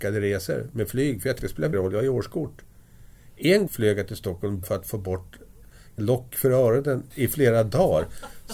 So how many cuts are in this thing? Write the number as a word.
six